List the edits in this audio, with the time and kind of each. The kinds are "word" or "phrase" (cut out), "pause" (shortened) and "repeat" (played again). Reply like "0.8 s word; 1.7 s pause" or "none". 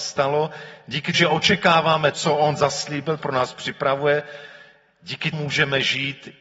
1.1 s word; 2.1 s word; 3.2 s word; 5.3 s word